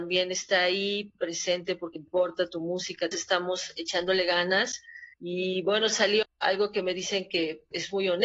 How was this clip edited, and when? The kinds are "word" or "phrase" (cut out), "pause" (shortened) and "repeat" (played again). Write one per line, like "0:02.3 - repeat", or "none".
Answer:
0:02.0 - word
0:03.1 - phrase
0:05.1 - pause
0:06.2 - word